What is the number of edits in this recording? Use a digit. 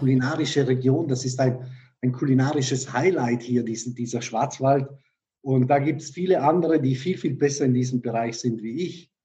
0